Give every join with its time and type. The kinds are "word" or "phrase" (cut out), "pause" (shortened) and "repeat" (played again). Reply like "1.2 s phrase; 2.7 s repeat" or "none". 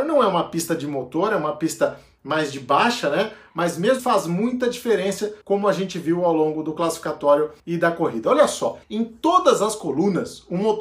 4.0 s word; 5.4 s pause; 7.6 s pause; 8.8 s pause